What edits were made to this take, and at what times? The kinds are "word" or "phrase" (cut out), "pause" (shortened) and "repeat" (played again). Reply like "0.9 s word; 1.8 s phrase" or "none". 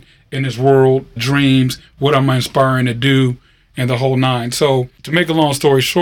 1.2 s word